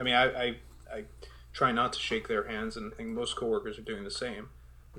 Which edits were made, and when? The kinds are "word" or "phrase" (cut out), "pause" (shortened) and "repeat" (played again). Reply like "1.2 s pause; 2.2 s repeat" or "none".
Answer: 2.9 s word